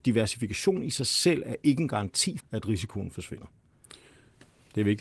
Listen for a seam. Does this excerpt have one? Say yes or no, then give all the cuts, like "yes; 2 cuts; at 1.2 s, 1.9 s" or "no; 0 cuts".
yes; 1 cut; at 2.4 s